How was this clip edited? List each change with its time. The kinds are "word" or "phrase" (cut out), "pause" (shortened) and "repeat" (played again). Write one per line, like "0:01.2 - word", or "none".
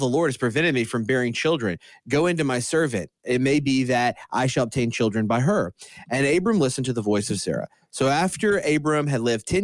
none

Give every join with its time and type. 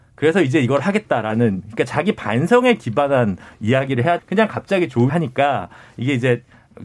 0:04.2 - word
0:05.1 - word

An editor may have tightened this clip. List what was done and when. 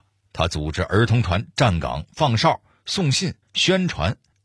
0:03.4 - pause

